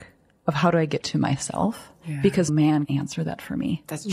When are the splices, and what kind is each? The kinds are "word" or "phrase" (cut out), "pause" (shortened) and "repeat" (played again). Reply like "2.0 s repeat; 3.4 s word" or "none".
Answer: 1.0 s word; 2.5 s word; 2.9 s word